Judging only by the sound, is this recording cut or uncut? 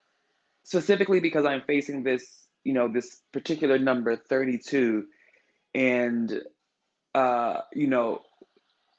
uncut